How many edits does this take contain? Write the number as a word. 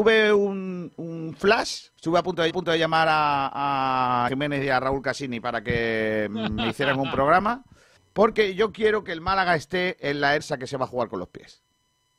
five